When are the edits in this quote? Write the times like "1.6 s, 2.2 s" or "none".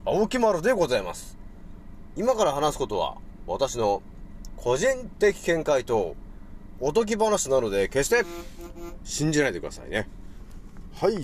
none

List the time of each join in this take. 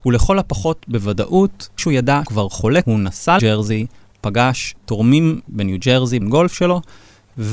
1.8 s, 2.3 s, 2.8 s, 3.4 s, 5.5 s, 6.2 s

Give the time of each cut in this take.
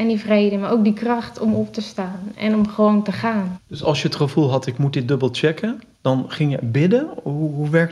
none

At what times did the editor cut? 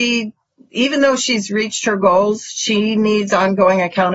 none

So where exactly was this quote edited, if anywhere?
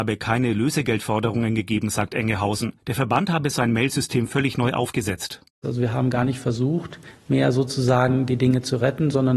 2.8 s

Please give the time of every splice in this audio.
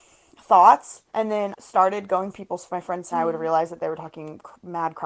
1.1 s, 1.5 s, 2.3 s, 2.7 s, 3.1 s

